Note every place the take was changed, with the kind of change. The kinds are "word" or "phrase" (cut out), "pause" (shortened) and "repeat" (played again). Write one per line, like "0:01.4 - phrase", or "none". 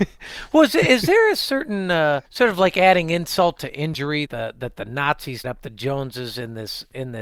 0:02.3 - pause
0:04.3 - word
0:05.4 - word